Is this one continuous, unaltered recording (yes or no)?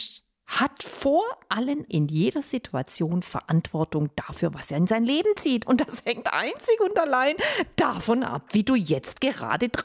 no